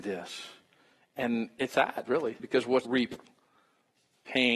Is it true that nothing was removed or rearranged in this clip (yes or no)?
no